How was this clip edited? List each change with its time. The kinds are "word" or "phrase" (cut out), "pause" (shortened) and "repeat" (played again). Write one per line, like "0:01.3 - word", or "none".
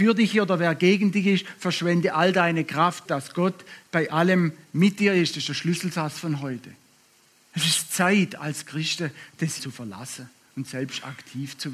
0:03.0 - word
0:07.0 - pause
0:09.6 - word

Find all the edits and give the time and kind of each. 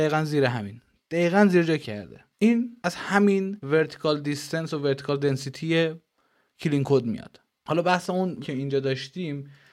0:01.8 - phrase
0:02.3 - pause
0:08.4 - word

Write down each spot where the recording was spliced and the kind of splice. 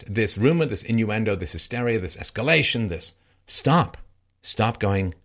0:03.3 - pause

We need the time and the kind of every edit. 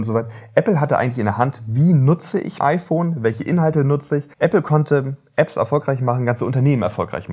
0:02.6 - word
0:04.3 - pause

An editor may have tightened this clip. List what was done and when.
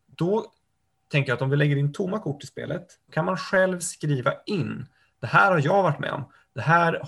0:03.1 - word

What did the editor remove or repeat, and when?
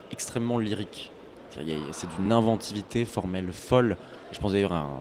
none

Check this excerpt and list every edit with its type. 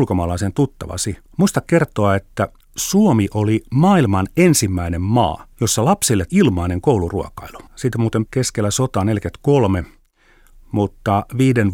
0:01.3 - pause
0:02.6 - pause
0:05.5 - pause
0:06.3 - word
0:07.7 - pause
0:08.3 - word

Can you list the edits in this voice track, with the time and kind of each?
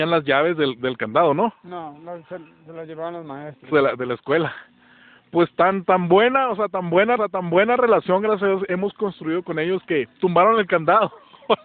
0:03.7 - phrase
0:07.2 - repeat
0:10.2 - pause

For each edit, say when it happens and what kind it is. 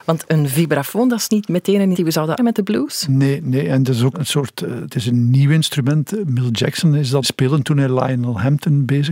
0:01.3 - word
0:01.9 - word
0:02.4 - word
0:04.1 - word
0:04.9 - word
0:07.2 - word

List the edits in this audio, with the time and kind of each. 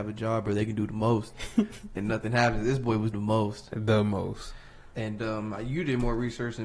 0:03.1 - word

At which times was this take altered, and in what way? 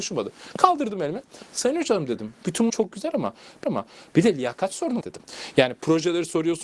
0:02.7 - word
0:03.6 - repeat
0:05.0 - word

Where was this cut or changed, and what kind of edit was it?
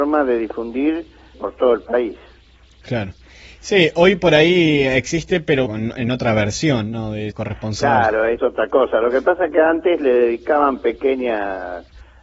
0:01.3 - word
0:05.7 - word
0:07.3 - word
0:08.4 - word

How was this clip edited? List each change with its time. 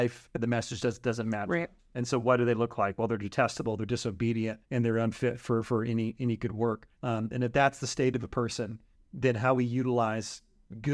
0:04.6 - pause
0:06.9 - pause
0:08.9 - pause

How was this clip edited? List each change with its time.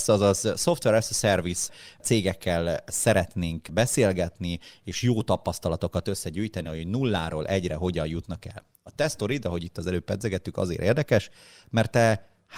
none

